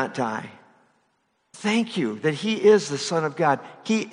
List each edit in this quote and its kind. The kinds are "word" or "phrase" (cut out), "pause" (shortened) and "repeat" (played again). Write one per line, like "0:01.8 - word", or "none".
none